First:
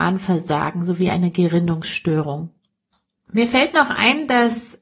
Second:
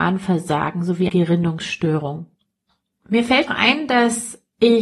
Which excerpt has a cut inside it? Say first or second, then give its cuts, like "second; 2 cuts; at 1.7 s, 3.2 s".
second; 2 cuts; at 1.1 s, 3.5 s